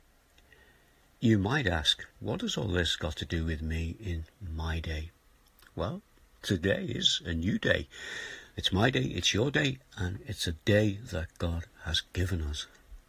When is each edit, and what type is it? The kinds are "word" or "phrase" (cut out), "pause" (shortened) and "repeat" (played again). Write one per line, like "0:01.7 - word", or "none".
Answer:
0:02.1 - pause